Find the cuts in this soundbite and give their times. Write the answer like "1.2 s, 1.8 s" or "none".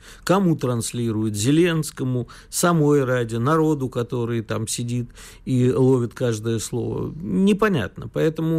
none